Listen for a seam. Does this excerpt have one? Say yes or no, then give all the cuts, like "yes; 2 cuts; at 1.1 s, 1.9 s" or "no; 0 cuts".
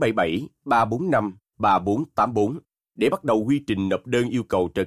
no; 0 cuts